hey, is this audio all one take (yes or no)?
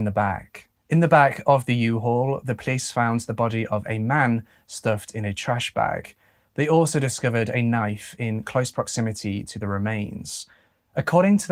yes